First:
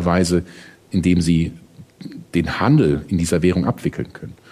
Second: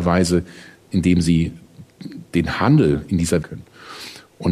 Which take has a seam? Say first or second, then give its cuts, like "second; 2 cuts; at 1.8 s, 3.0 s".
second; 1 cut; at 3.4 s